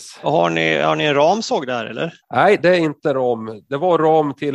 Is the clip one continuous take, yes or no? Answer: no